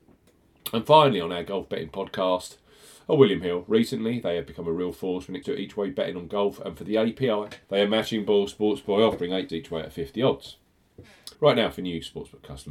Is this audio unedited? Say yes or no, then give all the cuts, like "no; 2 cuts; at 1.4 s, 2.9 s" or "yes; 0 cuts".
no; 4 cuts; at 5.4 s, 7.6 s, 9.5 s, 11.3 s